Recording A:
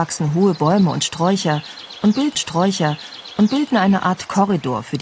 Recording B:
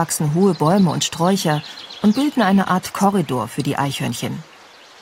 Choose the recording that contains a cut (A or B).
A